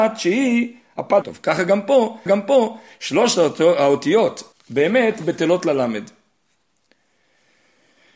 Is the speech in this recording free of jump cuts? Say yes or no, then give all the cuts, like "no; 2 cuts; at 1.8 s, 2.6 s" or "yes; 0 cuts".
no; 3 cuts; at 1.2 s, 2.3 s, 4.5 s